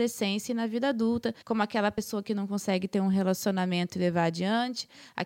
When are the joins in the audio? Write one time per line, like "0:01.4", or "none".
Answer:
0:01.4